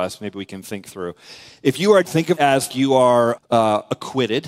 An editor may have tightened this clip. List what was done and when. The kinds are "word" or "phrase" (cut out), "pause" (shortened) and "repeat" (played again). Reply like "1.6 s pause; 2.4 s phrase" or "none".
2.0 s word; 2.4 s word; 2.7 s word; 3.4 s word